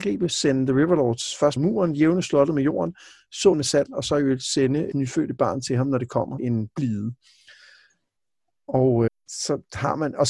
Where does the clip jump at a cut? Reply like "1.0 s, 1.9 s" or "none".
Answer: 1.6 s, 3.5 s, 4.9 s, 6.4 s, 9.1 s